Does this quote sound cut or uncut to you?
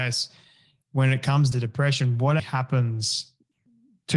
cut